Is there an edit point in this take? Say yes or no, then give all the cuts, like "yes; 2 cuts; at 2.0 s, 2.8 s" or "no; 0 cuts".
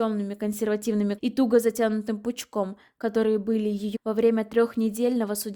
yes; 2 cuts; at 1.2 s, 3.9 s